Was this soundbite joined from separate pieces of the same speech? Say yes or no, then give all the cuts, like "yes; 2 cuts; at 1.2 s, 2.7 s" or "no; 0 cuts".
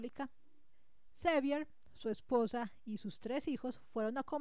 no; 0 cuts